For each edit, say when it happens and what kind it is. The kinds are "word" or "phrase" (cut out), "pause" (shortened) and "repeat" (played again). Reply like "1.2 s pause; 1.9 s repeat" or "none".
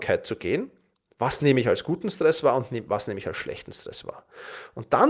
none